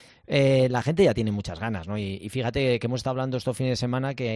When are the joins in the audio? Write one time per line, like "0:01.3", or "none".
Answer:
none